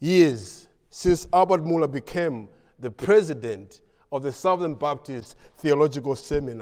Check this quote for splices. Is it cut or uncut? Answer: uncut